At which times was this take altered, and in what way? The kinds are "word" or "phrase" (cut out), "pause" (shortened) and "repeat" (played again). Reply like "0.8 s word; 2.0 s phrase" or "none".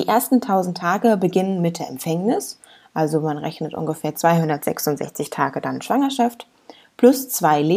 none

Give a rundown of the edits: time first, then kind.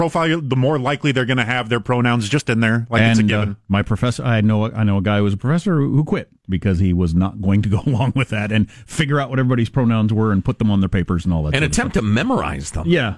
6.4 s pause

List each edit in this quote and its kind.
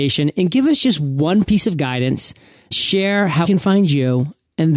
1.5 s word; 2.7 s word; 3.4 s word

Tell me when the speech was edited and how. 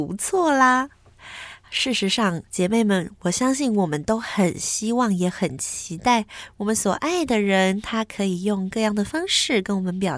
2.5 s pause

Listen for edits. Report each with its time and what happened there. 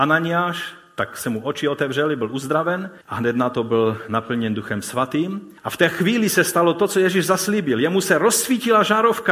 3.0 s pause; 5.6 s pause

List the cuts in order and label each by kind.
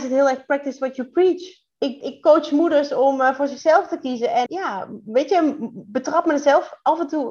2.0 s word; 4.5 s word

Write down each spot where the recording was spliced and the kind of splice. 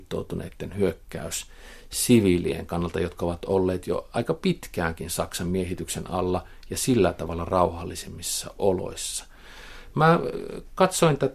none

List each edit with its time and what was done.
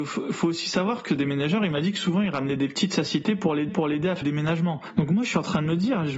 1.1 s phrase; 3.7 s repeat; 4.2 s word

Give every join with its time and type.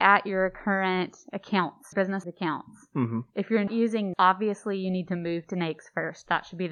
1.9 s word; 2.2 s word; 3.7 s word; 4.1 s word

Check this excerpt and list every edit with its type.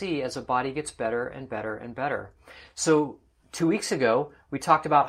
none

